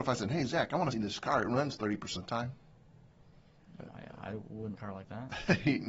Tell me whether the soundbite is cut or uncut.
cut